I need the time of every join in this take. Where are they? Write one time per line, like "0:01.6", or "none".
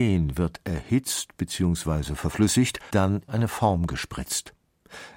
0:02.9
0:03.3